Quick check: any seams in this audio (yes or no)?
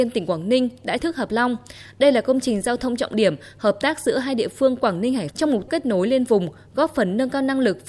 yes